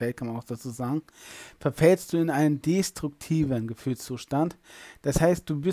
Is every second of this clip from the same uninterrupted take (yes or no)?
yes